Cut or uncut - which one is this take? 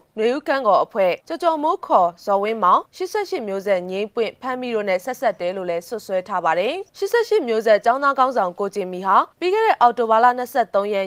cut